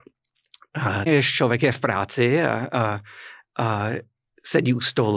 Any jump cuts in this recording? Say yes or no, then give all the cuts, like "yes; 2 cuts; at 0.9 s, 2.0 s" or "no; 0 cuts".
yes; 1 cut; at 1.1 s